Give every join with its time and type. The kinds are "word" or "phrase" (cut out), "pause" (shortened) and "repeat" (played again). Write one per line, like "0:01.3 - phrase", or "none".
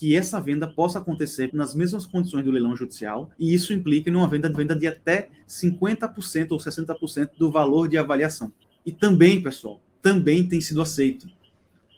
0:01.5 - word
0:03.3 - pause
0:04.5 - repeat
0:08.6 - pause